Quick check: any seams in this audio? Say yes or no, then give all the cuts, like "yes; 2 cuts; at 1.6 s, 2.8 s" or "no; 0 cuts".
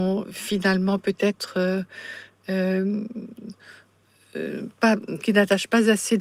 no; 0 cuts